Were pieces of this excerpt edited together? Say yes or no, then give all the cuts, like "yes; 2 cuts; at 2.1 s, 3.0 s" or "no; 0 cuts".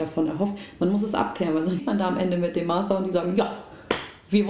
yes; 1 cut; at 1.8 s